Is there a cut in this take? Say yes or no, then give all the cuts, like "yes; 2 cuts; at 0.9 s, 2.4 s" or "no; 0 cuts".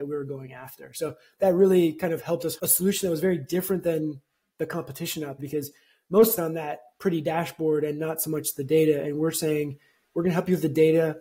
yes; 3 cuts; at 2.6 s, 5.4 s, 6.4 s